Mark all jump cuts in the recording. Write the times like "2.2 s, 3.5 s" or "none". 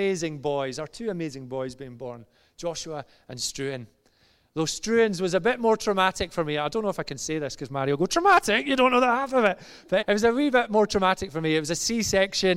10.0 s